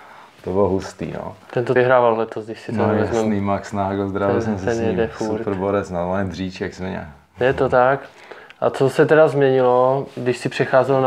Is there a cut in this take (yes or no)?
yes